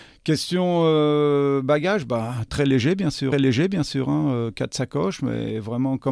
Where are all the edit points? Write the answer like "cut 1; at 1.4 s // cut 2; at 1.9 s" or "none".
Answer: cut 1; at 2.5 s // cut 2; at 3.3 s